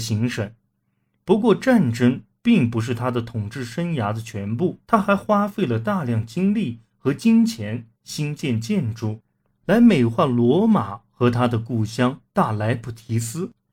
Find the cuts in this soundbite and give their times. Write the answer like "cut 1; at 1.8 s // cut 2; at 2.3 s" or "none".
cut 1; at 4.8 s // cut 2; at 12.3 s